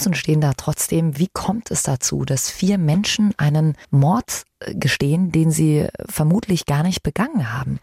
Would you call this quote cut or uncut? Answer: cut